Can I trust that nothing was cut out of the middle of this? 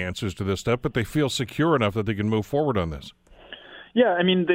yes; 0 cuts

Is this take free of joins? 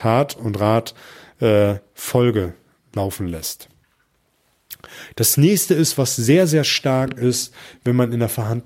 yes; 0 cuts

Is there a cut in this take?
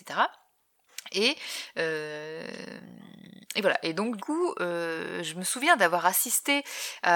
yes; 1 cut; at 4.2 s

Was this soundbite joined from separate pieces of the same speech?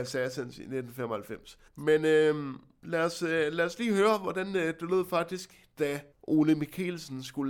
yes; 2 cuts; at 1.7 s, 6.1 s

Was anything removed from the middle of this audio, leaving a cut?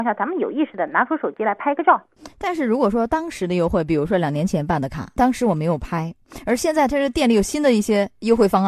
yes; 1 cut; at 5.2 s

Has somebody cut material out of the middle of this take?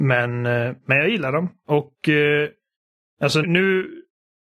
yes; 1 cut; at 3.4 s

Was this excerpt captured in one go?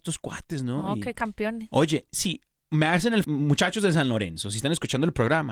no; 3 cuts; at 1.1 s, 2.5 s, 3.2 s

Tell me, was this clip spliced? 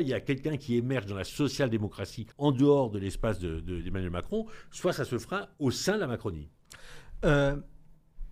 yes; 1 cut; at 2.3 s

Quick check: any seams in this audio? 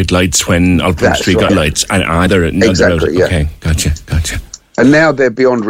yes; 2 cuts; at 1.5 s, 2.3 s

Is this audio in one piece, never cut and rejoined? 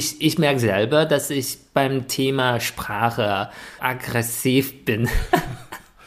no; 1 cut; at 3.8 s

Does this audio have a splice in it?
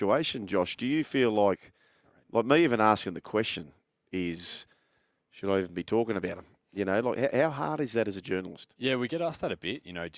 no; 0 cuts

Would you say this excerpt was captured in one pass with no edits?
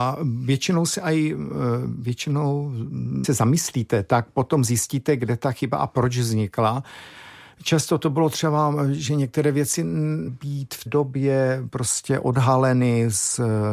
no; 3 cuts; at 3.2 s, 10.3 s, 10.9 s

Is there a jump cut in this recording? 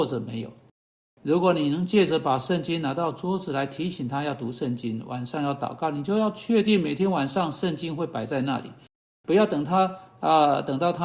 no; 0 cuts

